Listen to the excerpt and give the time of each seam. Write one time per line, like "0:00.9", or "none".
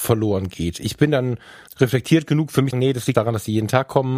0:01.7
0:02.7
0:03.1